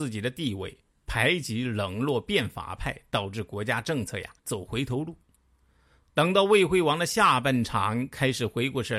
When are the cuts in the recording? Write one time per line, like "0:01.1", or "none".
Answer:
0:04.4